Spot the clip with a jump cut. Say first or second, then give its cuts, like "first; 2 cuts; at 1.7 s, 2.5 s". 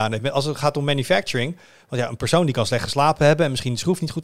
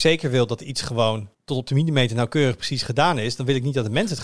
second; 1 cut; at 1.3 s